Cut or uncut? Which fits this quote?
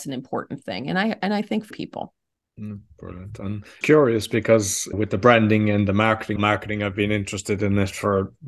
cut